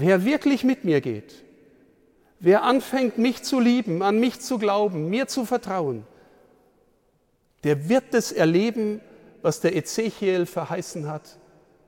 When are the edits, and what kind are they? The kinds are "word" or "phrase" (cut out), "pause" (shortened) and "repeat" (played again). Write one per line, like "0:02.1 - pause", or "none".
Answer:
none